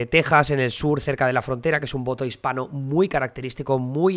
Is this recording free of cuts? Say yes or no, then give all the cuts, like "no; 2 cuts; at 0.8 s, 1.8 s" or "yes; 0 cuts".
yes; 0 cuts